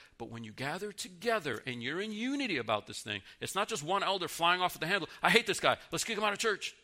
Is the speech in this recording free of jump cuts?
yes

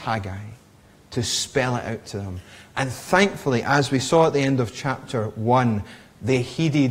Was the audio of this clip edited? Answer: no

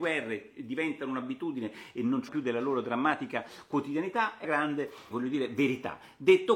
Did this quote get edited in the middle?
yes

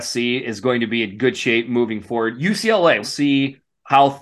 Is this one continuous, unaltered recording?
no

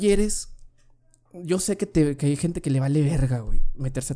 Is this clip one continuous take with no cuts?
no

